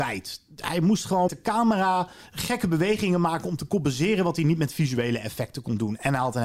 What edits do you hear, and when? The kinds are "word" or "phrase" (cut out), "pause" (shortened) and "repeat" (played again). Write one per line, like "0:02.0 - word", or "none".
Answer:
0:01.3 - word
0:02.2 - pause